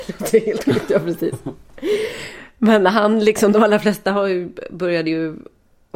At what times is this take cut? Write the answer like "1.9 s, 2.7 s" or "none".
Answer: none